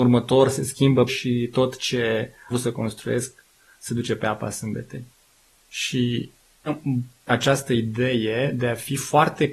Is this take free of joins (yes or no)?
no